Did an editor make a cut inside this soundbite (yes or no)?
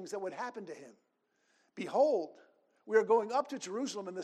no